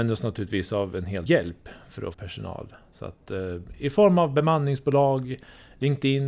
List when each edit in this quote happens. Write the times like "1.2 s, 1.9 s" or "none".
1.3 s, 2.1 s